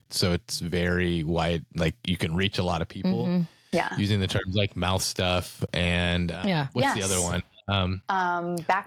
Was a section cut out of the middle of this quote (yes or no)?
no